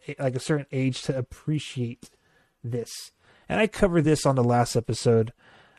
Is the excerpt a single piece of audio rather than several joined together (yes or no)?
yes